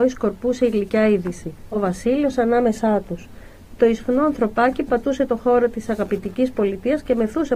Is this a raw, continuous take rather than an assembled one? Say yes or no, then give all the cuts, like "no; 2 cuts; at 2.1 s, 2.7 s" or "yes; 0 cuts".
yes; 0 cuts